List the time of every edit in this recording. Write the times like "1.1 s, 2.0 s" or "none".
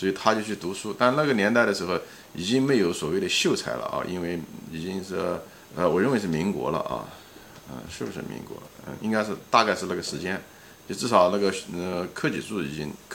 5.7 s